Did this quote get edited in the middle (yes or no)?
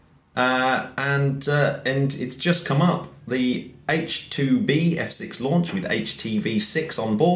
no